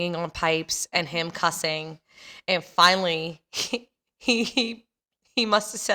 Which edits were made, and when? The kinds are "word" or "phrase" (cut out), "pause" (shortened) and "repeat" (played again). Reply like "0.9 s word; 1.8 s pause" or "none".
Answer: none